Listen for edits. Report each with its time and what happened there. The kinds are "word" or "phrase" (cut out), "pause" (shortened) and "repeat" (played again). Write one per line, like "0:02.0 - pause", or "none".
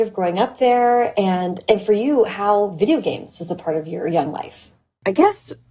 none